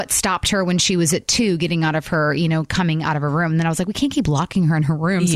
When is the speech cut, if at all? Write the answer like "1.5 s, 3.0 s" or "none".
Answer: none